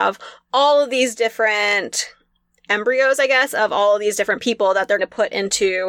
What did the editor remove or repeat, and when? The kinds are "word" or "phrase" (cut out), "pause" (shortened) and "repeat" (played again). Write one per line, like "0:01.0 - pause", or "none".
0:05.0 - word